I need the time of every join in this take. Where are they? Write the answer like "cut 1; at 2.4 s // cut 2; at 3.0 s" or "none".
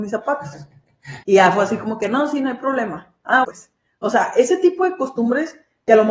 cut 1; at 1.2 s // cut 2; at 3.4 s